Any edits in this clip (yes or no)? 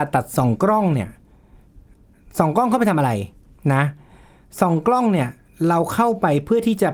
no